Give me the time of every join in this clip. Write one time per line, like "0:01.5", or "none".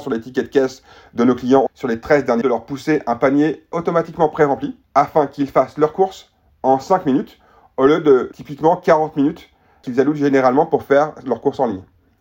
0:01.7
0:02.4
0:04.8